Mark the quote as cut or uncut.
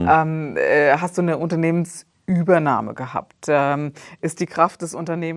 uncut